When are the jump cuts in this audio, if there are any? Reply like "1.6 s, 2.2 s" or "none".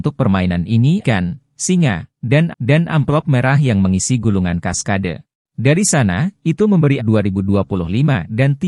1.0 s, 2.5 s, 5.3 s, 7.0 s